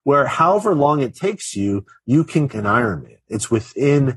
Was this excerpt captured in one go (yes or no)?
no